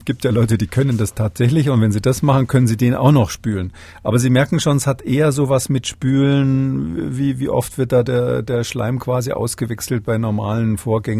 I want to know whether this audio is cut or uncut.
uncut